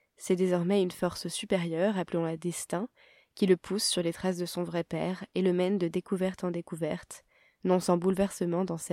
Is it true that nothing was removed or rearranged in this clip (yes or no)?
yes